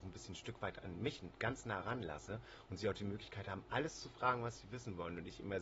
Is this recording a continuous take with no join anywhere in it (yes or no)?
yes